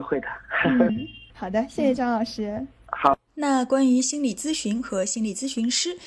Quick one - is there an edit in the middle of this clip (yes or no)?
yes